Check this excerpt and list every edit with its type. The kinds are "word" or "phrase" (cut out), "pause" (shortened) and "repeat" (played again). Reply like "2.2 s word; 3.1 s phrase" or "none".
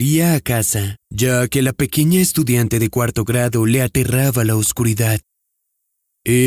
none